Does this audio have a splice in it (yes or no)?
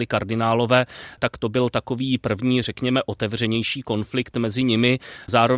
no